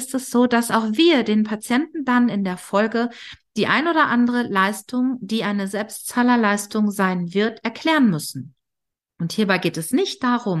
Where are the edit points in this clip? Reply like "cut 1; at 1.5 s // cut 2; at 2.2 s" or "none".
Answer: none